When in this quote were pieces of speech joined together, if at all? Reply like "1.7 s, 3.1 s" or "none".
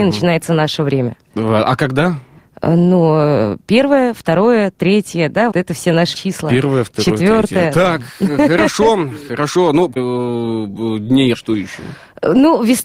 5.5 s, 6.1 s, 10.0 s, 11.3 s